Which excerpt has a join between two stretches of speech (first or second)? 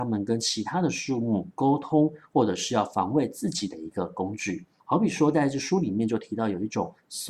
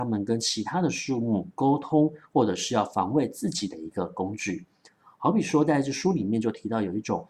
first